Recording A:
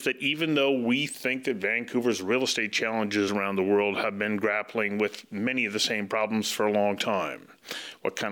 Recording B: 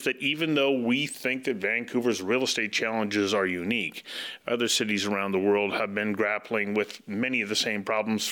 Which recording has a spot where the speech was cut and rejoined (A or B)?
A